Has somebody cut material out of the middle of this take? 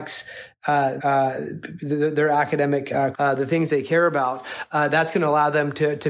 yes; 2 cuts; at 1.0 s, 3.1 s

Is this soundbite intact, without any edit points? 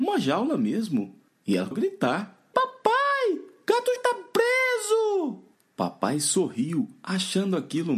no; 3 cuts; at 1.7 s, 2.5 s, 4.0 s

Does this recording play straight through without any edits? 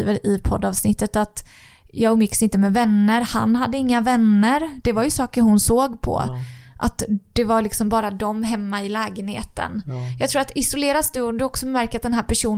yes; 0 cuts

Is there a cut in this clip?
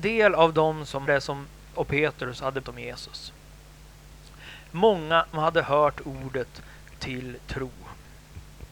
yes; 5 cuts; at 1.1 s, 1.7 s, 2.6 s, 5.3 s, 7.0 s

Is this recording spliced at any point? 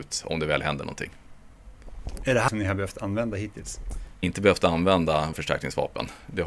yes; 3 cuts; at 2.5 s, 4.2 s, 5.3 s

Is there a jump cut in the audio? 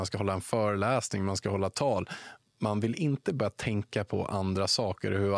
no; 0 cuts

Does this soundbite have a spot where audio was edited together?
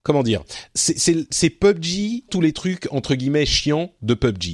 yes; 1 cut; at 2.3 s

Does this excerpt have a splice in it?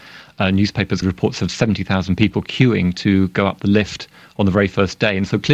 yes; 1 cut; at 1.0 s

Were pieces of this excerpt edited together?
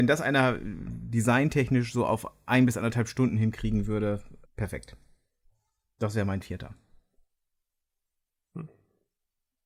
yes; 1 cut; at 4.4 s

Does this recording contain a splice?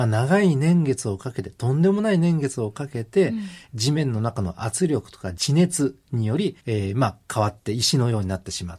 yes; 1 cut; at 6.6 s

